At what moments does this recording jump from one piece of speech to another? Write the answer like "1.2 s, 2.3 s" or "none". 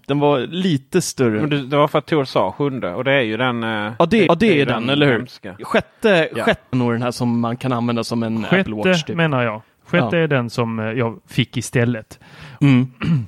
4.3 s, 6.7 s